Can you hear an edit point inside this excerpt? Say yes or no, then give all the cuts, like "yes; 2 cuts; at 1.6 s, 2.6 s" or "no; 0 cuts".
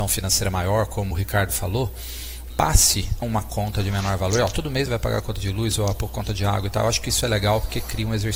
yes; 4 cuts; at 1.1 s, 2.5 s, 3.2 s, 4.9 s